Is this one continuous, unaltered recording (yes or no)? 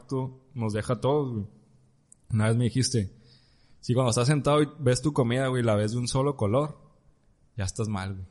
yes